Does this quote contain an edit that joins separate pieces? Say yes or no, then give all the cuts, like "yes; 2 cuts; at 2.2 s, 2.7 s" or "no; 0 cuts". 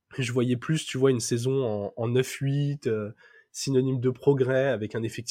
no; 0 cuts